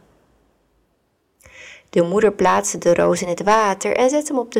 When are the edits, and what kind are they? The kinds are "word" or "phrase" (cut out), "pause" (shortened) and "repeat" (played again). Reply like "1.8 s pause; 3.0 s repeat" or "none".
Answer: none